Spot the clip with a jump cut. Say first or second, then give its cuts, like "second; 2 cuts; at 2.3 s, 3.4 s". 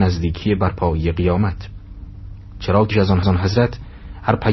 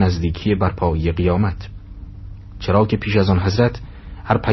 first; 2 cuts; at 2.9 s, 3.2 s